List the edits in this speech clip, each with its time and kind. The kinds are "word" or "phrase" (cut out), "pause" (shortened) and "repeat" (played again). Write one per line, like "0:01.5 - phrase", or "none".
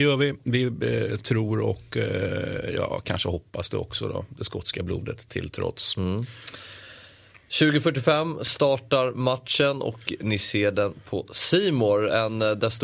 none